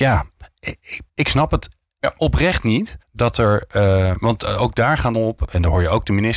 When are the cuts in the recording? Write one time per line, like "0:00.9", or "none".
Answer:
0:01.1
0:03.0
0:04.1
0:05.1